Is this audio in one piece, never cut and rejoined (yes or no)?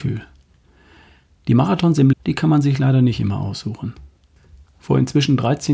no